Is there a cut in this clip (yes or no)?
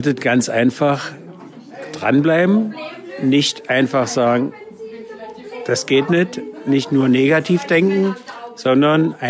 no